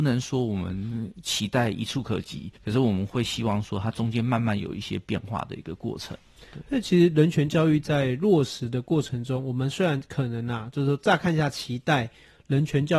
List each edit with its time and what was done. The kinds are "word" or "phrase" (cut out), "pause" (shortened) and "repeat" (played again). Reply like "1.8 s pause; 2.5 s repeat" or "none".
2.6 s pause